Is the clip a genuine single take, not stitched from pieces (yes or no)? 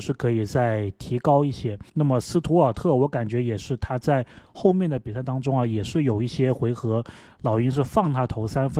no